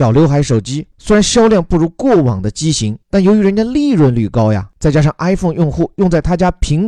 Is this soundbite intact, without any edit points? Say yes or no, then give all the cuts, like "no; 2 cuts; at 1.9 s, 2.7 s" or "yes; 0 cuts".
yes; 0 cuts